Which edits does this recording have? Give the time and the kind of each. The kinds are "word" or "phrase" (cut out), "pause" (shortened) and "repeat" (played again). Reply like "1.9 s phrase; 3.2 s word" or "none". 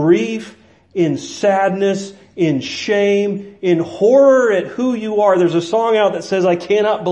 none